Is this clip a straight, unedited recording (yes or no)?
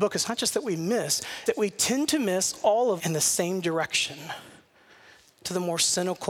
no